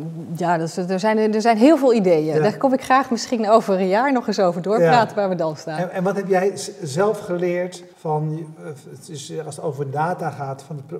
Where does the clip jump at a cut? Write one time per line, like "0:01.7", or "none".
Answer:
0:07.9